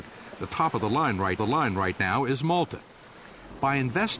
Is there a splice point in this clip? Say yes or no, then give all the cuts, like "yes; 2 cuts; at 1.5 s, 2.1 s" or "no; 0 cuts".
yes; 1 cut; at 1.4 s